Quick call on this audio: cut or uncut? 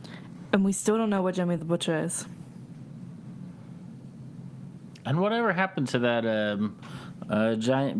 uncut